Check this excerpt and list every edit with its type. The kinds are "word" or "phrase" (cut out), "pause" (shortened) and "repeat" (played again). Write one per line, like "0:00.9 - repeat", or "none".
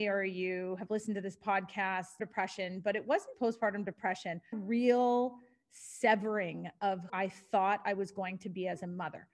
0:02.2 - phrase
0:03.3 - word
0:04.5 - phrase
0:07.1 - word